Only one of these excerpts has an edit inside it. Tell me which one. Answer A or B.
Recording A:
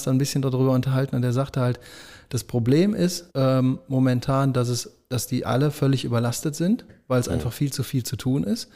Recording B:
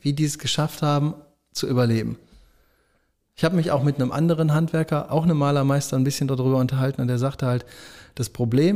A